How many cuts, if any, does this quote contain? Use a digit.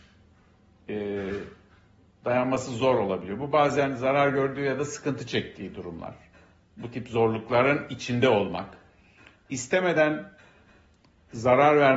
0